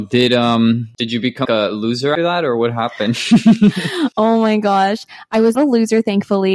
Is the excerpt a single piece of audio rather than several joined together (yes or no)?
no